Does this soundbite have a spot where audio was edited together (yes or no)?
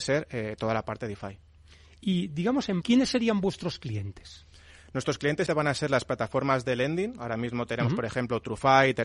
yes